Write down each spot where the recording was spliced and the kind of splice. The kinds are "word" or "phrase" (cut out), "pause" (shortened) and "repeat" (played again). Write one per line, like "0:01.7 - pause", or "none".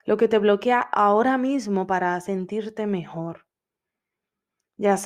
none